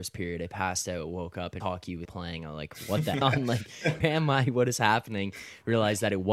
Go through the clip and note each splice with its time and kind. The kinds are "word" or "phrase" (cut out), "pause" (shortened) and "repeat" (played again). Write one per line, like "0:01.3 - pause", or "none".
0:01.6 - word
0:02.0 - word
0:03.2 - phrase
0:04.0 - word